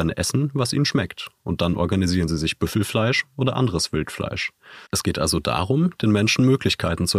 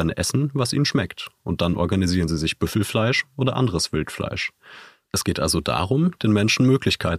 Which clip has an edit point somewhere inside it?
first; 1 cut; at 4.9 s

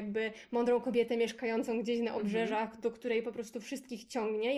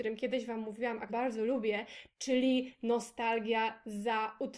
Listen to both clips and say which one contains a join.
second; 1 cut; at 1.1 s

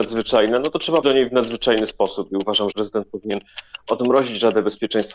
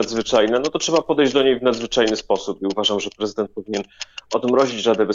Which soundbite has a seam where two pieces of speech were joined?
first; 2 cuts; at 1.0 s, 2.7 s

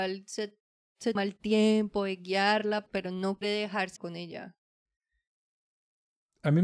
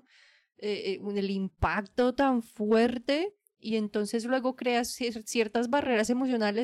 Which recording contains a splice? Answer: first; 4 cuts; at 1.2 s, 2.9 s, 3.4 s, 4.0 s

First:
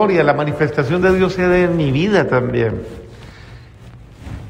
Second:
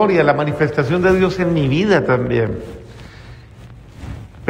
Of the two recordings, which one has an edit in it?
second; 1 cut; at 1.4 s

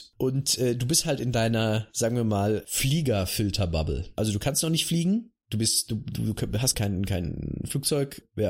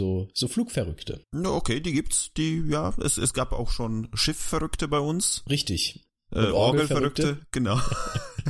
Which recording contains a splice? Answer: first; 1 cut; at 6.7 s

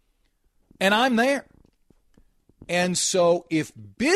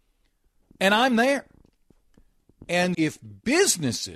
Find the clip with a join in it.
second; 1 cut; at 2.9 s

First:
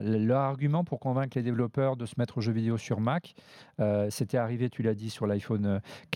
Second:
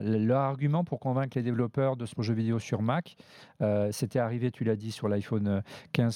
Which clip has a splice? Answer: second; 1 cut; at 2.2 s

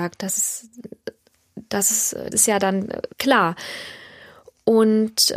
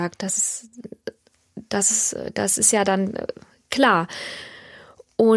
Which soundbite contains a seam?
first; 2 cuts; at 2.3 s, 3.1 s

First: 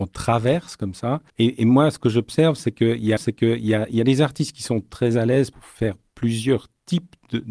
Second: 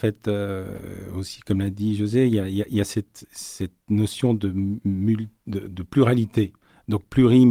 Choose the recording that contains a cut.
first; 3 cuts; at 1.3 s, 3.2 s, 5.5 s

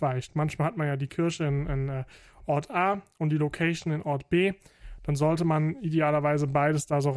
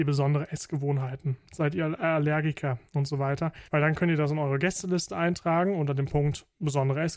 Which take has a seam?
second; 1 cut; at 3.7 s

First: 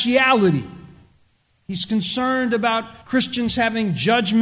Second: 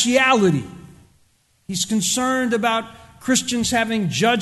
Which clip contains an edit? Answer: first; 1 cut; at 3.0 s

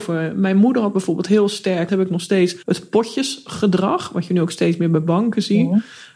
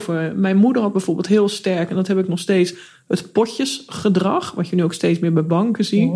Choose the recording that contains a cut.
first; 2 cuts; at 1.9 s, 2.6 s

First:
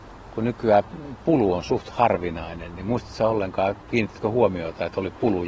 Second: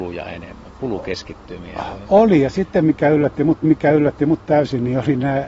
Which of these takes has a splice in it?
second; 1 cut; at 3.6 s

